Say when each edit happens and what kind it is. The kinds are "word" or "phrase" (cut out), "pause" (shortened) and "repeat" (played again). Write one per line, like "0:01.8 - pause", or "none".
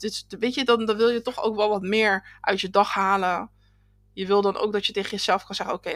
none

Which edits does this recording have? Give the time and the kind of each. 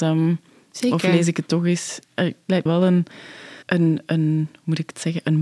0:02.7 - word
0:03.6 - pause

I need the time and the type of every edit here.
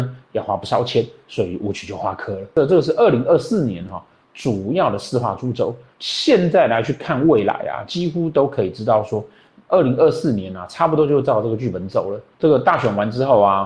none

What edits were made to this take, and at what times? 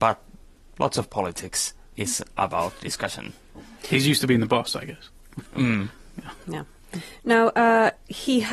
none

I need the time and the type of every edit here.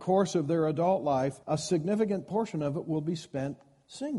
0:01.4 - pause

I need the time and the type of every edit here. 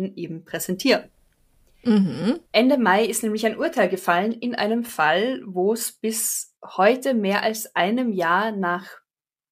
0:02.5 - pause
0:06.6 - pause

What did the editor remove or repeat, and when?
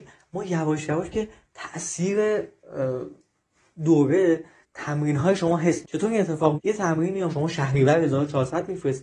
0:01.1 - word
0:04.6 - word
0:05.8 - word
0:06.6 - word
0:07.3 - word

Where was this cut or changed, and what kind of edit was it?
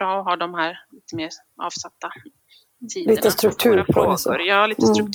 none

